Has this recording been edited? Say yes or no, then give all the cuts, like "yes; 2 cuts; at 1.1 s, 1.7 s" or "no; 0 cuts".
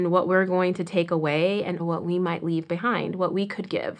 yes; 1 cut; at 1.8 s